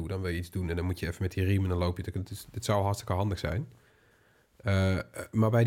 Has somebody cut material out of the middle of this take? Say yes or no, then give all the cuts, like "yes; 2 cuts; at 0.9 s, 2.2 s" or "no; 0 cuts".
no; 0 cuts